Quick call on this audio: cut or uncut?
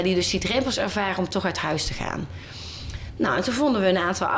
uncut